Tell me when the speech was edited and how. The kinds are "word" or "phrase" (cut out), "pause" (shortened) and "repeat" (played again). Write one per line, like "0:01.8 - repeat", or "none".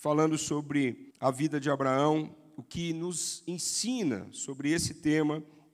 0:01.1 - pause